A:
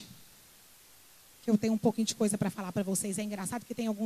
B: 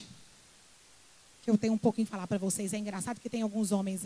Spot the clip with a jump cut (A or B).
B